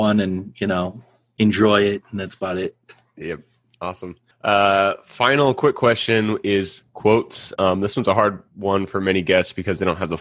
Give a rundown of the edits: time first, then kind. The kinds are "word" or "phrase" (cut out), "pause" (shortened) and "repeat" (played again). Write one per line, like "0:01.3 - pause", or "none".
0:04.3 - pause